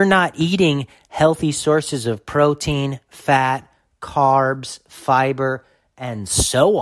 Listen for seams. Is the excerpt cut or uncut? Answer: uncut